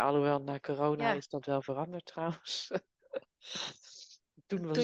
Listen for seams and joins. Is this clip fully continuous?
no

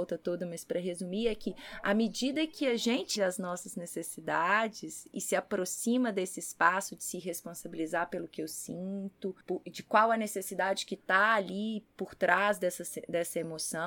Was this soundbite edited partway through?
yes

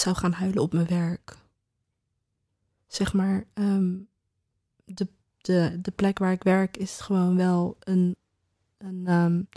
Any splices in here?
no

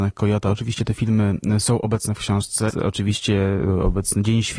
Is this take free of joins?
no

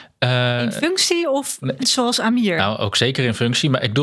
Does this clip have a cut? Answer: yes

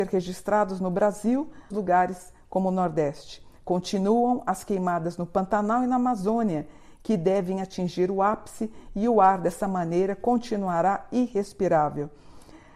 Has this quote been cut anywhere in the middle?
yes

